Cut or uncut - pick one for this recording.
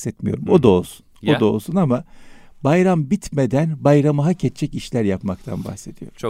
uncut